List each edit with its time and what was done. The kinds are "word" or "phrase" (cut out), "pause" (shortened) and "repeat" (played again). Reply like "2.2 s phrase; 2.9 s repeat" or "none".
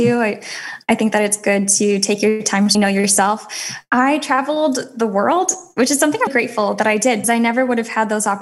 2.7 s word; 6.3 s word; 7.2 s word